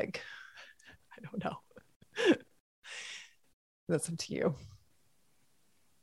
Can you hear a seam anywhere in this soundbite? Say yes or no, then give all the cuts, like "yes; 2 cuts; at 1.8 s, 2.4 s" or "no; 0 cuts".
no; 0 cuts